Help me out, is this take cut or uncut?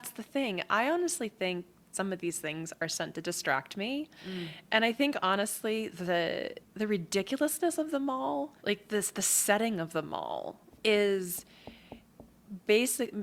cut